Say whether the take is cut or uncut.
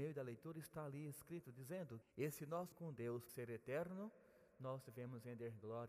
cut